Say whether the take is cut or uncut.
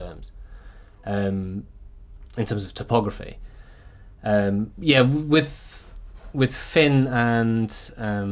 uncut